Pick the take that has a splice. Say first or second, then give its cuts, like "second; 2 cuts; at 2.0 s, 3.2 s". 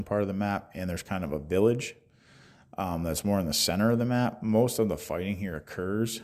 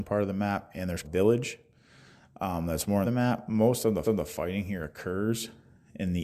second; 3 cuts; at 1.0 s, 3.0 s, 4.0 s